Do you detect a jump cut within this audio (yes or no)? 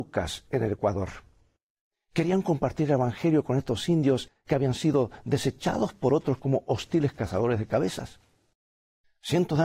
no